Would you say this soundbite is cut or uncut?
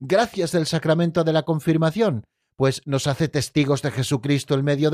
uncut